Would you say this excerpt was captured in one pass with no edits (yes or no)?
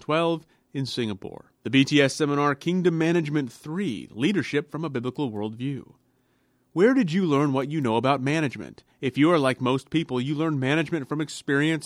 no